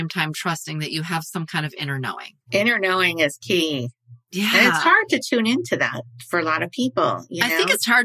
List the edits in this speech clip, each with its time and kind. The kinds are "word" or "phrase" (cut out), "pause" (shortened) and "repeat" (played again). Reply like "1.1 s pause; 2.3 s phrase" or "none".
2.4 s pause